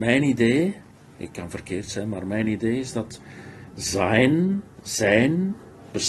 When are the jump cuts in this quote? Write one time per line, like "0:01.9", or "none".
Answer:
none

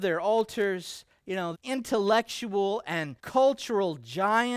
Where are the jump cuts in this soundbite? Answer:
0:01.5
0:03.2

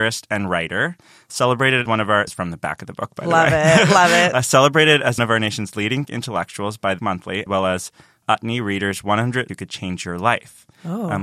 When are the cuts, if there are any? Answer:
0:01.8
0:02.3
0:05.2
0:06.1
0:07.0
0:07.5
0:08.2
0:09.5

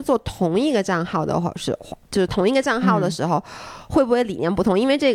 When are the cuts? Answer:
0:02.0

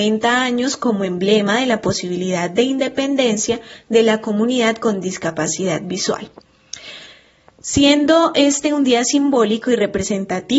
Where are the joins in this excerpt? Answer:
none

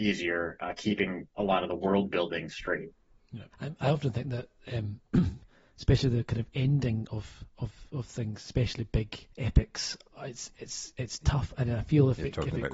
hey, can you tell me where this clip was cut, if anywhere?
0:03.5
0:09.3

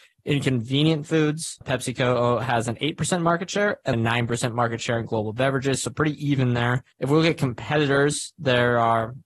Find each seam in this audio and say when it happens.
0:01.6
0:03.9
0:06.9

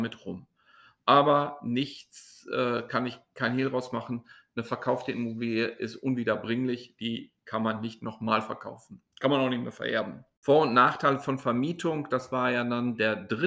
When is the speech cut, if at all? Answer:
none

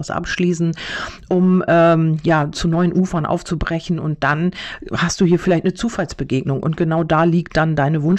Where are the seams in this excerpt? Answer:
none

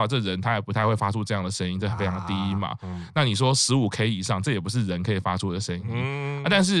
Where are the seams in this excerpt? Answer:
none

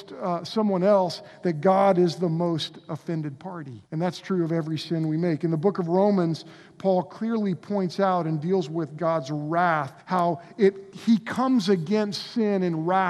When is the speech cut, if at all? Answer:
0:03.9
0:10.0

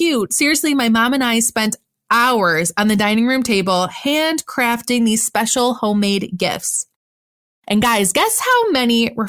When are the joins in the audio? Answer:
none

